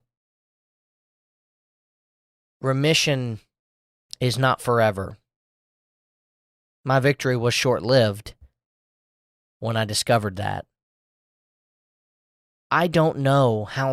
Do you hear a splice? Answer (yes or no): no